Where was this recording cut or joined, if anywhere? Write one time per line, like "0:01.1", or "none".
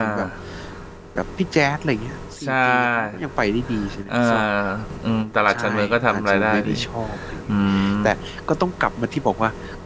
none